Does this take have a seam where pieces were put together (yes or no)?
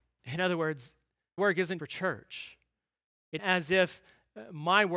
yes